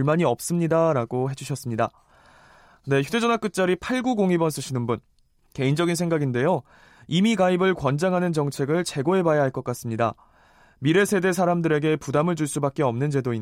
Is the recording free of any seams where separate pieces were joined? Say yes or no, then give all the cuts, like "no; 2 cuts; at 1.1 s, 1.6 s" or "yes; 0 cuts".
yes; 0 cuts